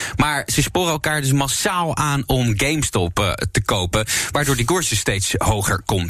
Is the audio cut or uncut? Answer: uncut